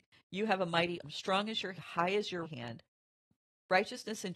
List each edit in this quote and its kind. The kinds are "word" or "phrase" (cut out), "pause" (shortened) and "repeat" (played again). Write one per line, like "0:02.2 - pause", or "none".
0:01.0 - word
0:01.8 - word
0:02.4 - word